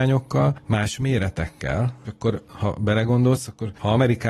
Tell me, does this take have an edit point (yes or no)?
yes